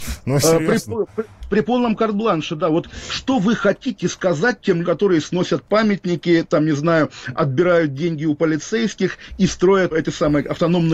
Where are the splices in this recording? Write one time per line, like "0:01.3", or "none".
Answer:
0:04.8
0:09.9